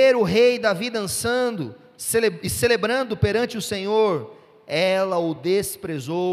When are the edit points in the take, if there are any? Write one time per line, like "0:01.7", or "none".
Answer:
none